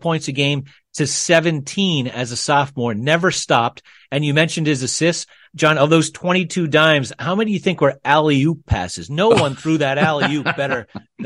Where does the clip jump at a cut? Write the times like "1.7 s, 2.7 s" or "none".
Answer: none